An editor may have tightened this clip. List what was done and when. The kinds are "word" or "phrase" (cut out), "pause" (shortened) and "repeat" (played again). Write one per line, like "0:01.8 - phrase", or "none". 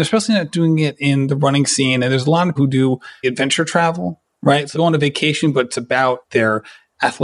0:02.6 - word
0:03.2 - word
0:04.7 - word
0:06.2 - word